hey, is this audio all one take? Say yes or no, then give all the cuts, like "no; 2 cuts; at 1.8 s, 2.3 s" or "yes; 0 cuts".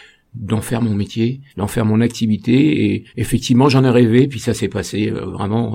no; 2 cuts; at 1.5 s, 3.1 s